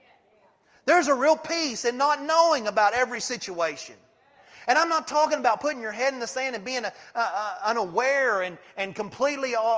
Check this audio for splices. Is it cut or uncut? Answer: uncut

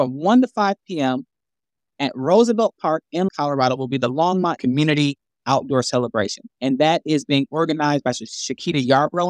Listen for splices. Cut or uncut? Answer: cut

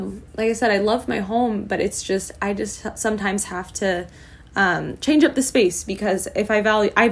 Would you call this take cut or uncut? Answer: uncut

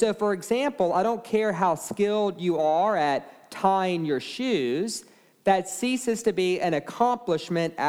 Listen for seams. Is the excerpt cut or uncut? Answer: uncut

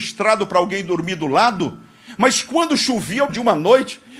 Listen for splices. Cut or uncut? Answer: cut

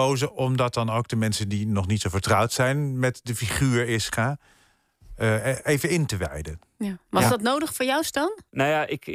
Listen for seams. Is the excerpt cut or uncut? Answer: uncut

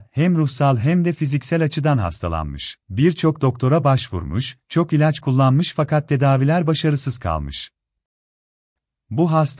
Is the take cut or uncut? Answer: cut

